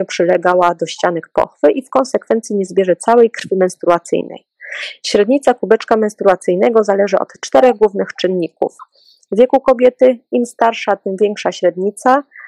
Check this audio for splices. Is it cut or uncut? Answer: uncut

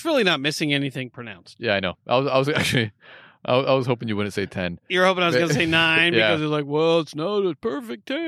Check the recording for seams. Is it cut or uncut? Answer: uncut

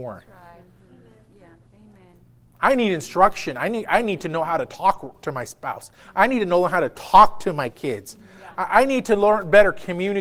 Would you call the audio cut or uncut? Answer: uncut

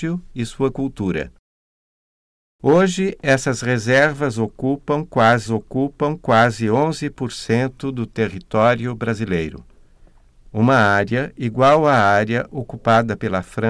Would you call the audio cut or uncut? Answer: cut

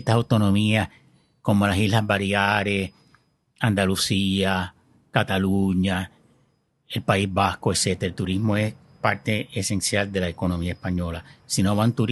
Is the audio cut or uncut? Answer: uncut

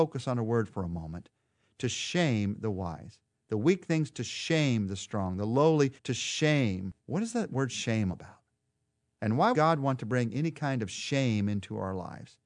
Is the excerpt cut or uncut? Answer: cut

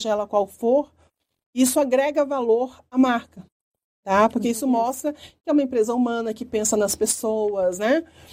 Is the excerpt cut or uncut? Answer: uncut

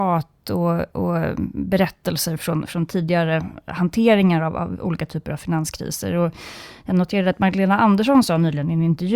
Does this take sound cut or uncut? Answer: uncut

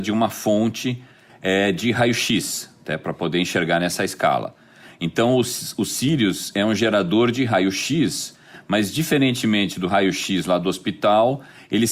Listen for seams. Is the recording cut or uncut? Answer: uncut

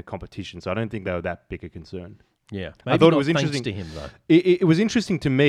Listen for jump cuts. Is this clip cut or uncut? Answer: uncut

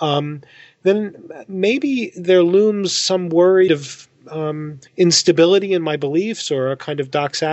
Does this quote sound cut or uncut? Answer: cut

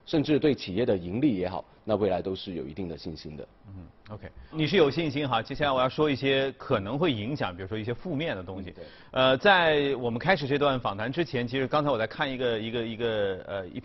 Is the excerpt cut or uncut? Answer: cut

